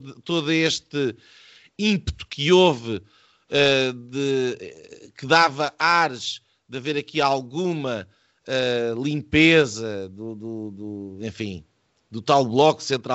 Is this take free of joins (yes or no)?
yes